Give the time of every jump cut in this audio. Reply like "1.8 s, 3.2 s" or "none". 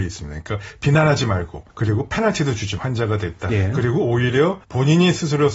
1.7 s, 2.8 s, 3.5 s, 4.6 s